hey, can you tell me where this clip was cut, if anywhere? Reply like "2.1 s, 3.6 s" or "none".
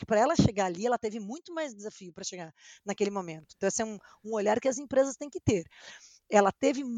none